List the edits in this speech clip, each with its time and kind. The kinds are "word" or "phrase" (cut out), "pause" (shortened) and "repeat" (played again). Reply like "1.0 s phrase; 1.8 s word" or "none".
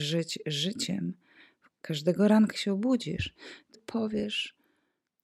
1.7 s word; 2.5 s word; 3.7 s word